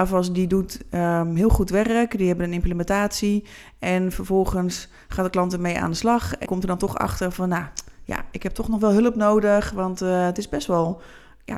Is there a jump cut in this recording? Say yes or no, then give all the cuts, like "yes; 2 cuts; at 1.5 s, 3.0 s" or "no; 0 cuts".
yes; 1 cut; at 6.5 s